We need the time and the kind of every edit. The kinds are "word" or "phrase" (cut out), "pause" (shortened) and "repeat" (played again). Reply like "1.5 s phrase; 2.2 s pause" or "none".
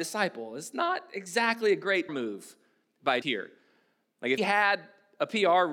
2.1 s word; 3.2 s word; 4.4 s word